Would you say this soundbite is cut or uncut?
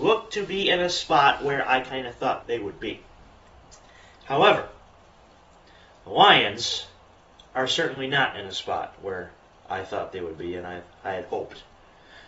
cut